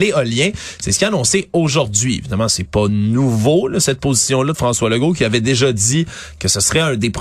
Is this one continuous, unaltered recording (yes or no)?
yes